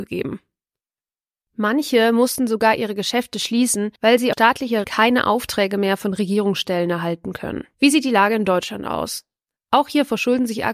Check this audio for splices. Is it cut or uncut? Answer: cut